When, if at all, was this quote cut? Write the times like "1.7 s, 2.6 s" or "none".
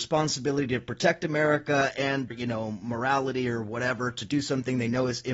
2.3 s

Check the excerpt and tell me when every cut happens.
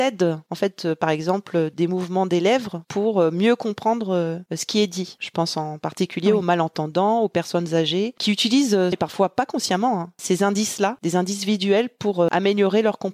8.9 s

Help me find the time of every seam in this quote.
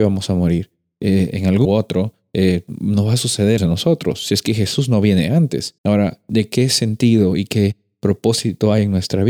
1.6 s, 3.6 s, 5.8 s

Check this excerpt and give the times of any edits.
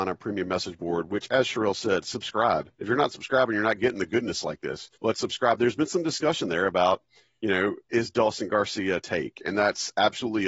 2.7 s, 5.0 s, 7.8 s

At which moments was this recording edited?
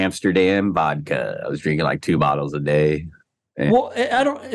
none

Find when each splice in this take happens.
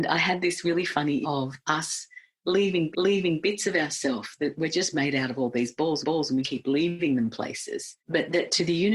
1.2 s, 2.9 s, 6.0 s, 6.4 s, 8.0 s

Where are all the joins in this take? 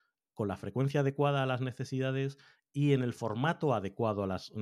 none

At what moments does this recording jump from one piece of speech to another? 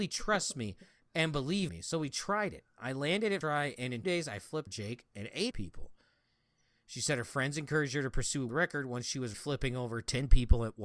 1.7 s, 3.4 s, 4.0 s, 4.7 s, 5.5 s, 8.5 s, 9.3 s

